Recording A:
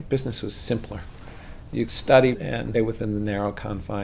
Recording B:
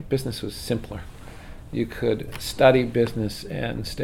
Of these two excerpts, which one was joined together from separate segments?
A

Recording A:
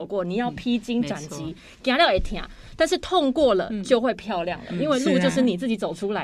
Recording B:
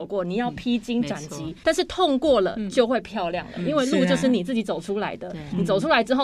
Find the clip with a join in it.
B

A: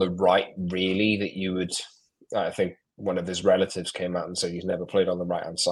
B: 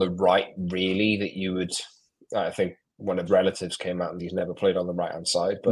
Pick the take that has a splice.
B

